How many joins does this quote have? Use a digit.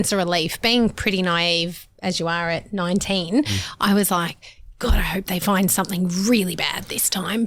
0